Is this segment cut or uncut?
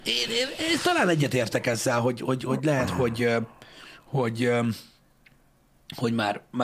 uncut